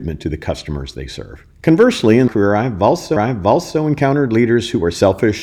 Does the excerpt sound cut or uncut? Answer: cut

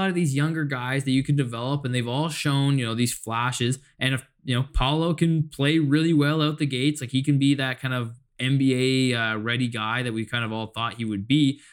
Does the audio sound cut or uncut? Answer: uncut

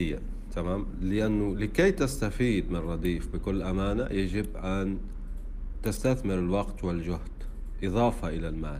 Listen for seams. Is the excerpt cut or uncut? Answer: uncut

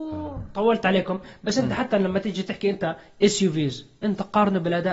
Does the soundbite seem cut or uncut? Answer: uncut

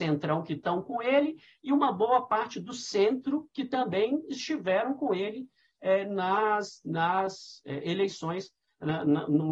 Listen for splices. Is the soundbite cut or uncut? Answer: uncut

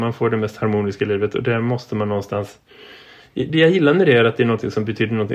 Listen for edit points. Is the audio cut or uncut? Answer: uncut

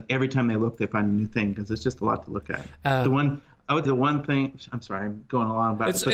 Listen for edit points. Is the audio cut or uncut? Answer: cut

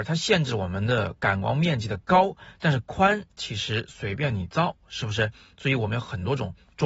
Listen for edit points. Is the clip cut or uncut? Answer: uncut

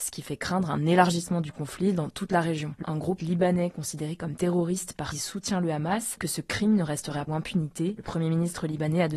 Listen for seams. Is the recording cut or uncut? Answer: cut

